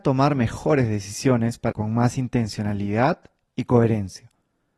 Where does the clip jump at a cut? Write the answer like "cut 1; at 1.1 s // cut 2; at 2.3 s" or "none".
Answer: cut 1; at 1.7 s